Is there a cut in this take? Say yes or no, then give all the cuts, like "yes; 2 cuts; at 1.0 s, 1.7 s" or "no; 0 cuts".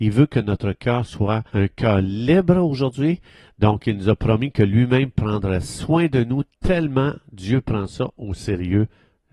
yes; 1 cut; at 1.5 s